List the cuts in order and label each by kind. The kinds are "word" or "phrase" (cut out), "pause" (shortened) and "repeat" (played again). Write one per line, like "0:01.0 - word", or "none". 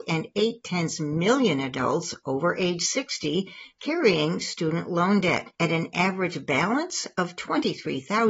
0:05.5 - pause